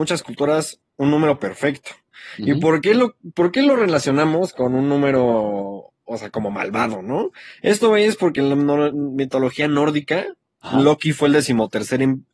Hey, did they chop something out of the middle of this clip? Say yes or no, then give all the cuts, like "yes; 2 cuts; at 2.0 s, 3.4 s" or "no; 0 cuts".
no; 0 cuts